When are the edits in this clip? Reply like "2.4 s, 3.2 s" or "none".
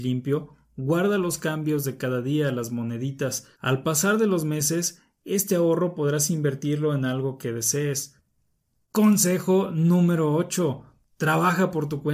3.5 s